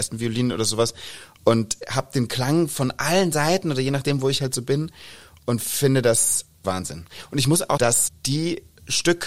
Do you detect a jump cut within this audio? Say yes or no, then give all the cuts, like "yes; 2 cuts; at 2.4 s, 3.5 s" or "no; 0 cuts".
yes; 3 cuts; at 6.6 s, 7.8 s, 8.1 s